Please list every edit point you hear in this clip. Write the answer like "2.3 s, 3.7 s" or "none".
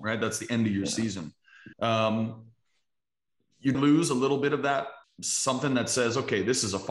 1.7 s, 3.7 s, 5.0 s